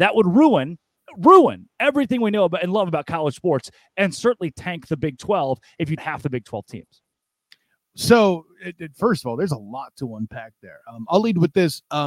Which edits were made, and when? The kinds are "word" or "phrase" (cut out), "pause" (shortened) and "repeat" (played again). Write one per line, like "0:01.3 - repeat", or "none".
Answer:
0:06.0 - phrase